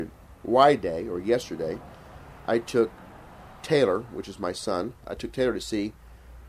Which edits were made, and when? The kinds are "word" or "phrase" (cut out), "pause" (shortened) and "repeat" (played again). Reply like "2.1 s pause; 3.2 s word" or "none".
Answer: 5.0 s pause